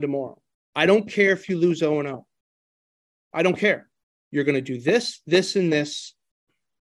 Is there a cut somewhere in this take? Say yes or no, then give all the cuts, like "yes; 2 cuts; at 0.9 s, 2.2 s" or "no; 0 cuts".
no; 0 cuts